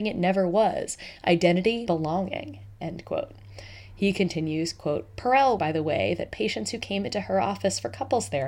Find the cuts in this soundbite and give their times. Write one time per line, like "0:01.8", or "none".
0:01.9
0:05.6